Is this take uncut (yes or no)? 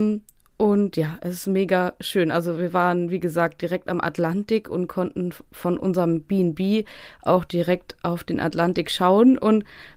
yes